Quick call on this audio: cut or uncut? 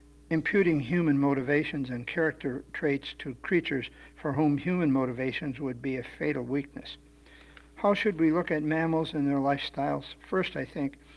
uncut